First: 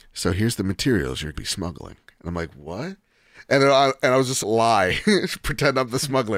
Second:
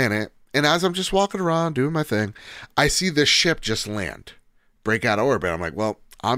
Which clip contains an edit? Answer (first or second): first